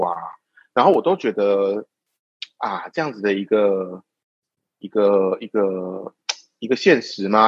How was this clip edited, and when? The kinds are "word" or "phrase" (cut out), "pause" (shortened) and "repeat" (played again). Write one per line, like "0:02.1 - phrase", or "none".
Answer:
none